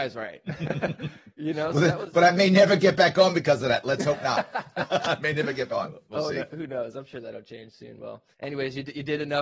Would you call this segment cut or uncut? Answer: cut